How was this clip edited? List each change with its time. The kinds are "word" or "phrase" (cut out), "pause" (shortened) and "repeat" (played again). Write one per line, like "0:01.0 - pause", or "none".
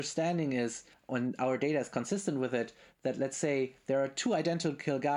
0:00.9 - pause